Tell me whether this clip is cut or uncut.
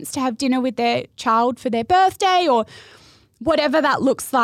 uncut